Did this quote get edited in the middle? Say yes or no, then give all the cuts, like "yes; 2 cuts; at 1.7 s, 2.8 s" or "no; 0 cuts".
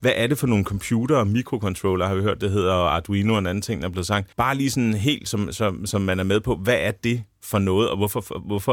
yes; 1 cut; at 4.3 s